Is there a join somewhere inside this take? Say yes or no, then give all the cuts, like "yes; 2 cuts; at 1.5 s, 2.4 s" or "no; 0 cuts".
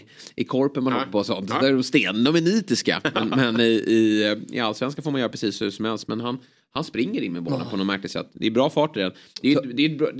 no; 0 cuts